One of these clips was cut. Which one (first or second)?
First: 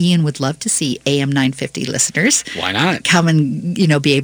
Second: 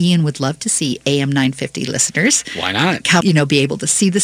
second